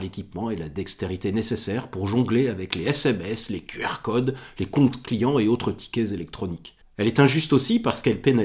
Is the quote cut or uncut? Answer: cut